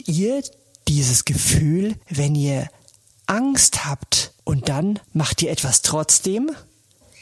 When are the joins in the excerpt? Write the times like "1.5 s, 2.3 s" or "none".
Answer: 2.0 s, 4.4 s, 5.0 s